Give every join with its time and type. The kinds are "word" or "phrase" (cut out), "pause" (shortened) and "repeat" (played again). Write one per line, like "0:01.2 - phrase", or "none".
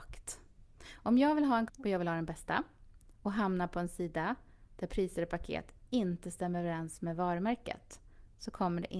0:01.7 - word